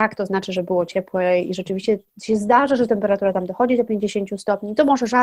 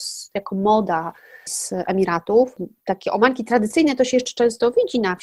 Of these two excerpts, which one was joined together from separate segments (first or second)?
second